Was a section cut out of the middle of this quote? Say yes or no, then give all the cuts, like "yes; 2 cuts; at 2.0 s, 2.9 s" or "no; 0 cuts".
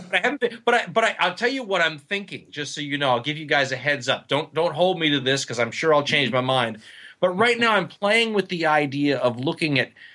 no; 0 cuts